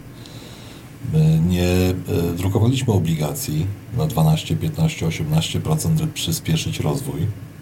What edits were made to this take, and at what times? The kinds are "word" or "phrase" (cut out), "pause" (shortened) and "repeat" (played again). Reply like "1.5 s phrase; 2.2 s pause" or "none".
6.0 s word

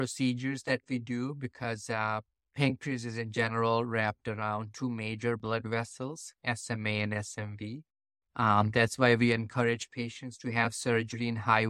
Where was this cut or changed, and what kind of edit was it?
none

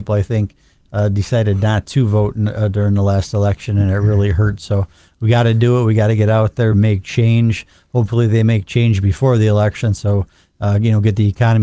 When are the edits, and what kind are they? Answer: none

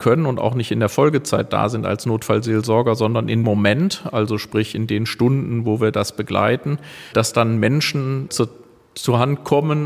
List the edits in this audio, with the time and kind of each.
3.4 s word; 7.1 s word; 8.3 s word

